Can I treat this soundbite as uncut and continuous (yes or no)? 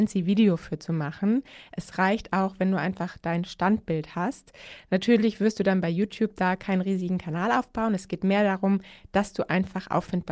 yes